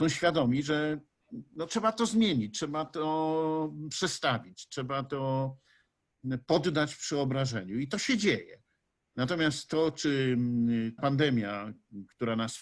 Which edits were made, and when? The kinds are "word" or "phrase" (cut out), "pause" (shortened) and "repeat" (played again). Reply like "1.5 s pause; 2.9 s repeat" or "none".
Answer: 11.0 s word